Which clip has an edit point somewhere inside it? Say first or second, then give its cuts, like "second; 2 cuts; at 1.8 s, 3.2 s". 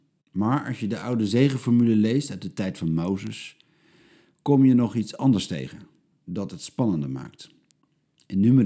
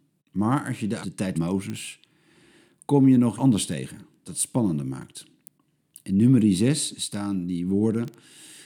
second; 4 cuts; at 1.0 s, 1.3 s, 3.4 s, 4.3 s